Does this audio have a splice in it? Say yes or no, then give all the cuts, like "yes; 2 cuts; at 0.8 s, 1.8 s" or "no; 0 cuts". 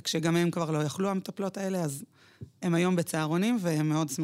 no; 0 cuts